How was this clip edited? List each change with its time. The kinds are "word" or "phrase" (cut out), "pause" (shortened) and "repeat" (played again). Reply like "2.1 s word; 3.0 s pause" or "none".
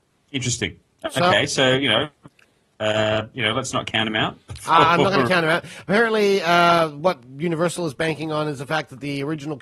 none